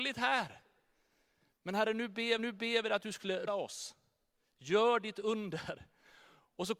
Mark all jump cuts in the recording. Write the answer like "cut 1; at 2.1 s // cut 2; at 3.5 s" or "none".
cut 1; at 2.4 s // cut 2; at 3.5 s